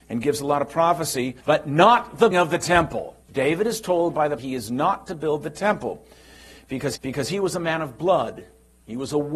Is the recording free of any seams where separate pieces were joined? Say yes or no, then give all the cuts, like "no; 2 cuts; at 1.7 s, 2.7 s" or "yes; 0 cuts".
no; 5 cuts; at 1.4 s, 2.3 s, 3.2 s, 4.4 s, 7.0 s